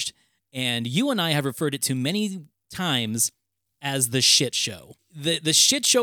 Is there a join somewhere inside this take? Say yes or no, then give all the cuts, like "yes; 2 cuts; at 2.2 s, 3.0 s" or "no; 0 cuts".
no; 0 cuts